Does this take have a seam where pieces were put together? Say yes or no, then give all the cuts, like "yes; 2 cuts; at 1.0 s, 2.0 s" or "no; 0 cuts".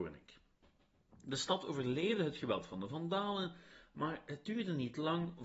no; 0 cuts